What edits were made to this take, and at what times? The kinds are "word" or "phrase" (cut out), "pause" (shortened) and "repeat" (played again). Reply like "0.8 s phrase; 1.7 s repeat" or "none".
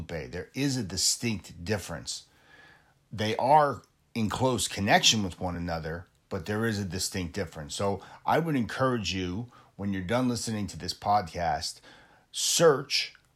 none